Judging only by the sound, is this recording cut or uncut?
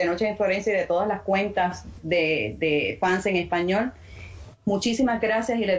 uncut